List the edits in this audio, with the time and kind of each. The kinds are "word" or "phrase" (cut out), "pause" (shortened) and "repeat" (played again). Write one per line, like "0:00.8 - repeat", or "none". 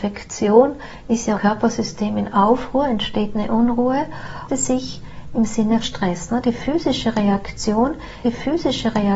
0:01.3 - word
0:04.5 - phrase
0:05.8 - word
0:08.2 - repeat